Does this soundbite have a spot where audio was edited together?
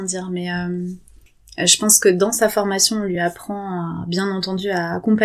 no; 0 cuts

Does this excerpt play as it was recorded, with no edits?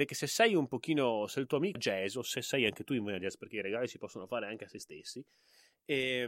no; 1 cut; at 1.8 s

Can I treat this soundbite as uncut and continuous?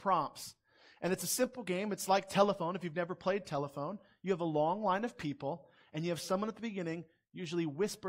yes; 0 cuts

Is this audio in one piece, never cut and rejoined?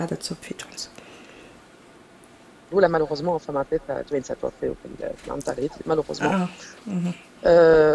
no; 1 cut; at 2.7 s

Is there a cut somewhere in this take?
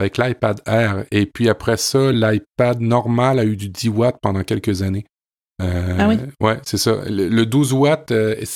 no; 0 cuts

